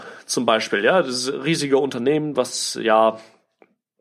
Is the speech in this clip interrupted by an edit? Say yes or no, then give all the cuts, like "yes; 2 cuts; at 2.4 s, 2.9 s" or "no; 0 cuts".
no; 0 cuts